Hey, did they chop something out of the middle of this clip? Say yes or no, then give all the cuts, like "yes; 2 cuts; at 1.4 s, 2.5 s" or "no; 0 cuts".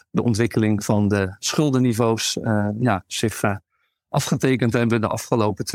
no; 0 cuts